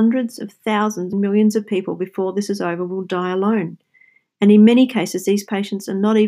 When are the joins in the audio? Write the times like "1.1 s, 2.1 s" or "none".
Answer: 1.1 s